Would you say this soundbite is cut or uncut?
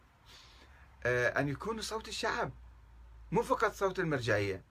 uncut